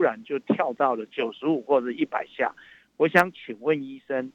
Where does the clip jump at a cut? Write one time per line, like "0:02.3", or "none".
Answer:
none